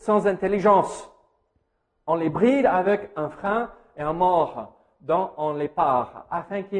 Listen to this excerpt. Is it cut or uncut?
uncut